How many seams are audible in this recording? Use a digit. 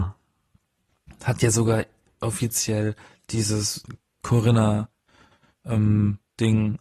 0